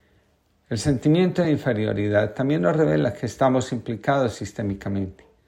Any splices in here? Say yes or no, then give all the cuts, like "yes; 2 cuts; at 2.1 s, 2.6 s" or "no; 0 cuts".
no; 0 cuts